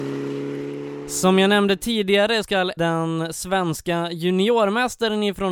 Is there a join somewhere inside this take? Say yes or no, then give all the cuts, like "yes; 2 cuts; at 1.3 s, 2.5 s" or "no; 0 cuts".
yes; 2 cuts; at 2.4 s, 2.8 s